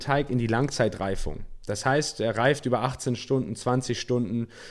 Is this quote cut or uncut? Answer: uncut